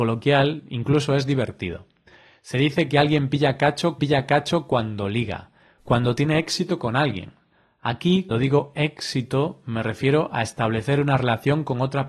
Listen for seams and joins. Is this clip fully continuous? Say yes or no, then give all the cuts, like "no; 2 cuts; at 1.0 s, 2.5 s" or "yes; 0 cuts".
no; 2 cuts; at 4.0 s, 8.3 s